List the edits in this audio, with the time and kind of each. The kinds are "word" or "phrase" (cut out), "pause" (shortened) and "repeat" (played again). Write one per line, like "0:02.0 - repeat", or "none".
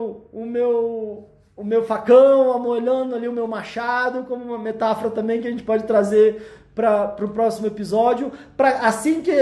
none